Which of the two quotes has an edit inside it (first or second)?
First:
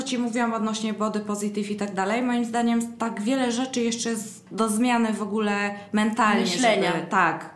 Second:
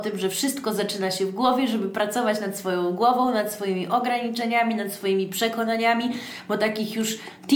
first